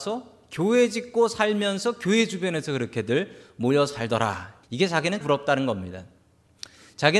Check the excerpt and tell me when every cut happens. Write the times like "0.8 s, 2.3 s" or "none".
4.6 s, 5.2 s